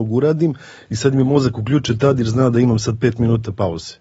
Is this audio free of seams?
yes; 0 cuts

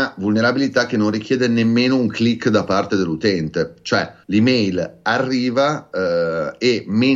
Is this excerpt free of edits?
no; 1 cut; at 4.2 s

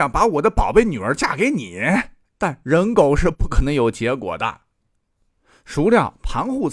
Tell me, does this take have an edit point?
no; 0 cuts

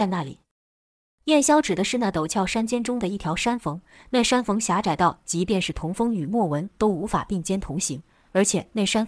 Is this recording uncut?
yes; 0 cuts

